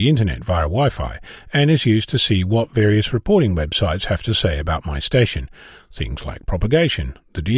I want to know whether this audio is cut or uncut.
uncut